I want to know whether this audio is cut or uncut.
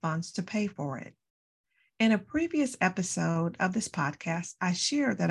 uncut